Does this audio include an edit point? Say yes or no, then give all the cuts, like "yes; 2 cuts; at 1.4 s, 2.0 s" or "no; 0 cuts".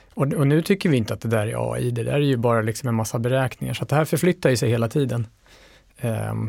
no; 0 cuts